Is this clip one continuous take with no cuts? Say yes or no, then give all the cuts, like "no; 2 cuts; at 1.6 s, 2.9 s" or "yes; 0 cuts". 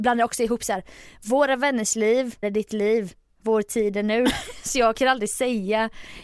no; 1 cut; at 2.4 s